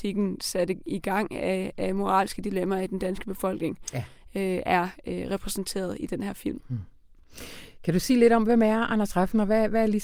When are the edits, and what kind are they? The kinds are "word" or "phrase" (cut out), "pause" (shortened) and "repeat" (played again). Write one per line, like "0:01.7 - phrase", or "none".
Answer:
none